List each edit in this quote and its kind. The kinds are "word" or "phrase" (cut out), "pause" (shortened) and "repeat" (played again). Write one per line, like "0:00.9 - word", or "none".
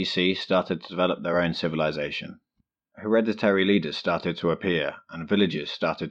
none